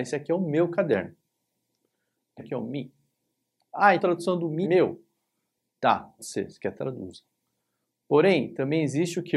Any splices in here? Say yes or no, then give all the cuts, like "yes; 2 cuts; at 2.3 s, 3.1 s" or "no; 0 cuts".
yes; 5 cuts; at 2.4 s, 4.0 s, 4.6 s, 6.2 s, 6.7 s